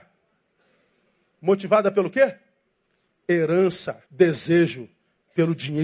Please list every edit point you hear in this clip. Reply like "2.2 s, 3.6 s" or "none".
4.1 s